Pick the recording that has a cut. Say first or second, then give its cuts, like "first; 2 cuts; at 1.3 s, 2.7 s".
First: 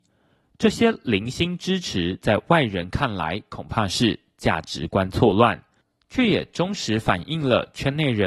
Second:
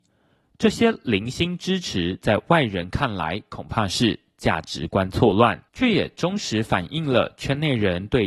second; 1 cut; at 5.7 s